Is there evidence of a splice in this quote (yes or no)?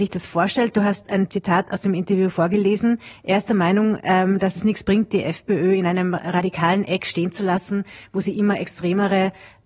no